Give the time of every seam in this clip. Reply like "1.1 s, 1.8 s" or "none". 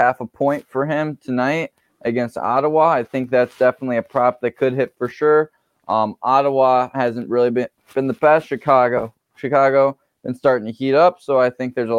none